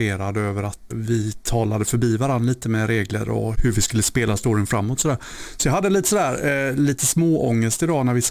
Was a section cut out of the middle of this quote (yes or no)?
yes